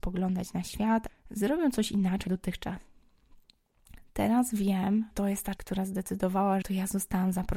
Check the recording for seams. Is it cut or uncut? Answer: cut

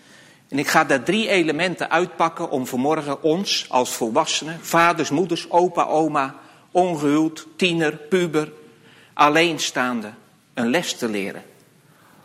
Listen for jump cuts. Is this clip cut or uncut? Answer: uncut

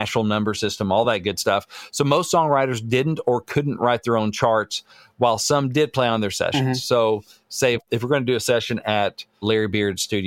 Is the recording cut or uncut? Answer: uncut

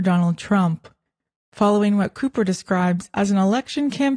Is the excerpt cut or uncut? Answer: uncut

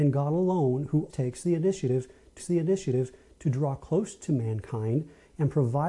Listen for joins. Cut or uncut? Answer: cut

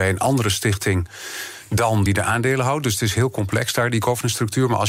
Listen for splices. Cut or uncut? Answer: cut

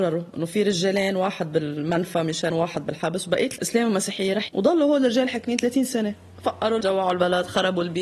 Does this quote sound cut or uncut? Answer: cut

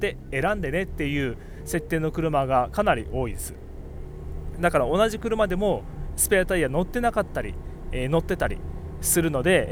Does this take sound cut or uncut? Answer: cut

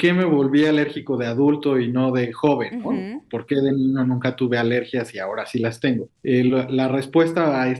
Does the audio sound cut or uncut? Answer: cut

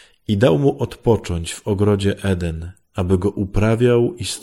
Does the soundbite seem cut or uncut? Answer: uncut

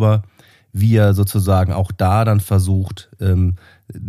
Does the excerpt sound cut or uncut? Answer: uncut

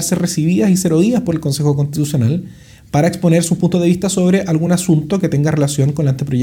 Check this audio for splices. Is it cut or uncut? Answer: uncut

